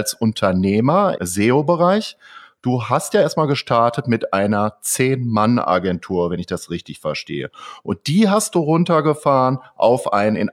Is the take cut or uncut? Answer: cut